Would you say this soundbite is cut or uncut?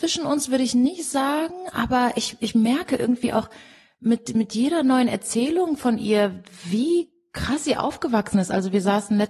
uncut